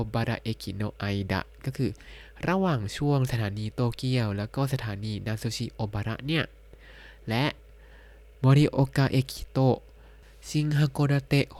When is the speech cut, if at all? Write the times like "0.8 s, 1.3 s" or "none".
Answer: none